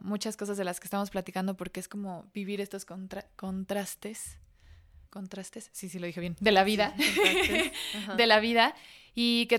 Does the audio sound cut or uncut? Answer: cut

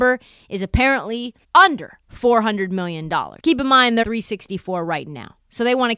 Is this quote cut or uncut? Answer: cut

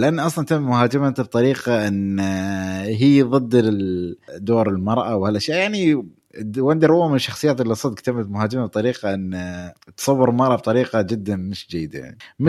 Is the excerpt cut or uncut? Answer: uncut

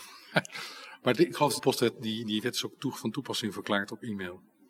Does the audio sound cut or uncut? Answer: cut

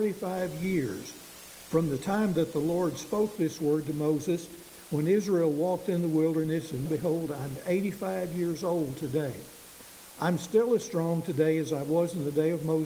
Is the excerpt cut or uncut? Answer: cut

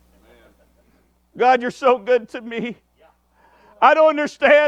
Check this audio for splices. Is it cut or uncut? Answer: uncut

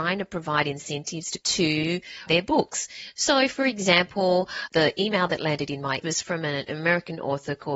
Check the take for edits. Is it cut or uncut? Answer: cut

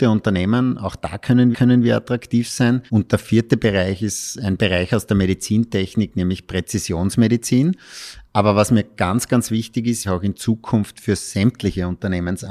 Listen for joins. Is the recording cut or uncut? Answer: cut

